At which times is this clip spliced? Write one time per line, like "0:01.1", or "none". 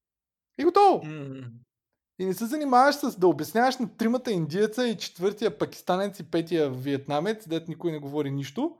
none